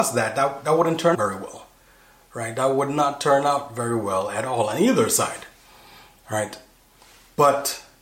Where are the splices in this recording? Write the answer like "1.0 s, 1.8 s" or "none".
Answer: 1.1 s